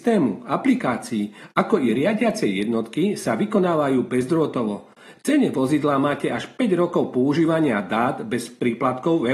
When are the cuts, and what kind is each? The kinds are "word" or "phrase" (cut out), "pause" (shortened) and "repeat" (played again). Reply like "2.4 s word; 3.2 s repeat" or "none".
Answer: none

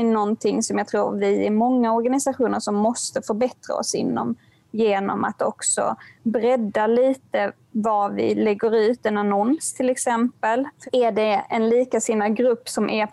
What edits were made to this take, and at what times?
none

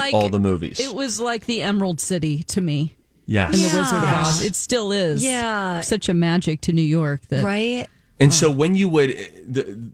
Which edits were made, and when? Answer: none

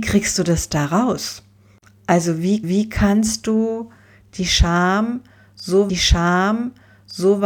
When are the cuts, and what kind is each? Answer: 2.6 s repeat; 5.9 s repeat

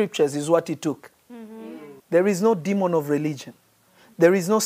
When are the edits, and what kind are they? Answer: 2.0 s pause

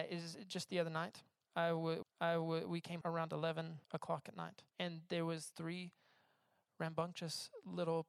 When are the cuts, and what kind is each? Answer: 2.0 s repeat; 3.0 s word; 3.8 s pause; 4.7 s pause; 5.5 s word

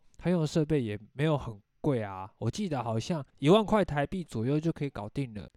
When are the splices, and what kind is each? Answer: 3.3 s pause

